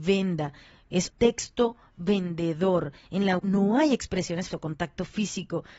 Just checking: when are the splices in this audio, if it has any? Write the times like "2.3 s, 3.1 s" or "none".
1.1 s, 3.4 s, 4.5 s